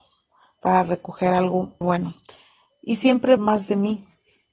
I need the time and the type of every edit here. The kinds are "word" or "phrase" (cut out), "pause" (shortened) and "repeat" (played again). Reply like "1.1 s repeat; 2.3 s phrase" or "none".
1.8 s word; 3.4 s word